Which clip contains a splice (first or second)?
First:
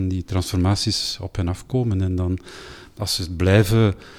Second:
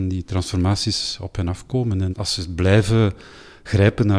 second